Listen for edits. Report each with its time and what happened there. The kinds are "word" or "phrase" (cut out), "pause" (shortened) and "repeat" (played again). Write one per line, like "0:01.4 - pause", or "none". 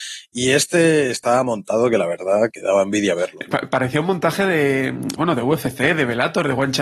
0:02.5 - word
0:05.2 - word